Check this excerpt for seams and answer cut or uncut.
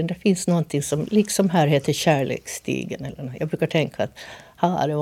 uncut